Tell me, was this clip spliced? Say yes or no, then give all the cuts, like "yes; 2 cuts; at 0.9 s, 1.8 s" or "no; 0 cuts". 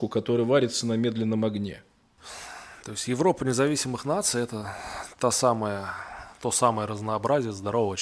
no; 0 cuts